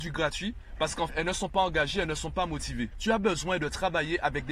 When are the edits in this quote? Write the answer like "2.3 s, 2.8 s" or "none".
1.1 s